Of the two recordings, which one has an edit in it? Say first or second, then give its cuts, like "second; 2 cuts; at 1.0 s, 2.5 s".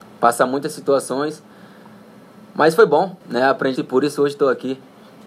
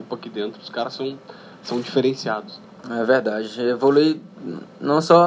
first; 2 cuts; at 3.2 s, 3.8 s